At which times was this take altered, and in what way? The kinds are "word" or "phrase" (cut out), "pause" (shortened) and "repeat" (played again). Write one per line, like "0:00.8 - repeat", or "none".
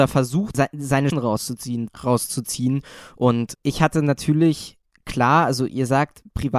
0:01.1 - word
0:01.9 - phrase
0:03.5 - word